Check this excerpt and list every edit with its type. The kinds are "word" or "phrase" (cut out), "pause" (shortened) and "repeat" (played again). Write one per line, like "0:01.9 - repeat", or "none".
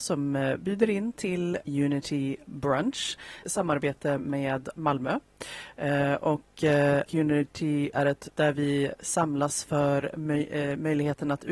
0:01.6 - word
0:03.4 - word
0:04.7 - word
0:07.1 - word
0:07.9 - word
0:08.3 - word